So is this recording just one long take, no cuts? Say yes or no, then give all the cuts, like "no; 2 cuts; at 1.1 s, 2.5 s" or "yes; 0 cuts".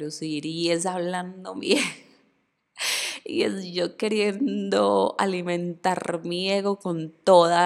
yes; 0 cuts